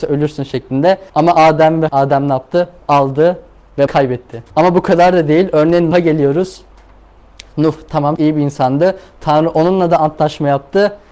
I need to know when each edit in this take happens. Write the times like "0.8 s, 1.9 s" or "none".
1.1 s, 1.9 s, 3.9 s, 4.5 s, 5.9 s, 8.2 s